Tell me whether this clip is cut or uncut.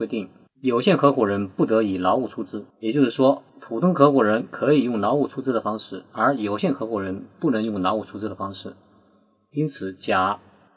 cut